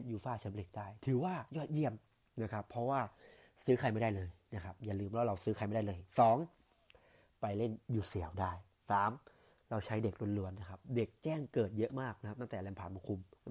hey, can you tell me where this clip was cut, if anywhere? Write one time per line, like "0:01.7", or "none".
none